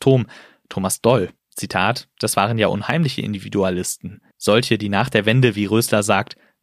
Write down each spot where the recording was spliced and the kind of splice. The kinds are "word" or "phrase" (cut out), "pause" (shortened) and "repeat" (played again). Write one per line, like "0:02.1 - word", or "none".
0:01.4 - pause
0:04.3 - pause